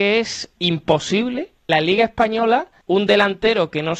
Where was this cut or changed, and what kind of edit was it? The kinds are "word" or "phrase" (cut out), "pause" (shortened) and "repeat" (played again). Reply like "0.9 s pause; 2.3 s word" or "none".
1.7 s phrase; 2.8 s pause